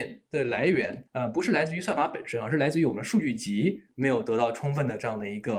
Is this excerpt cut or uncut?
cut